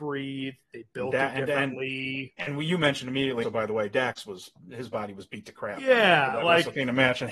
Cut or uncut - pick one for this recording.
cut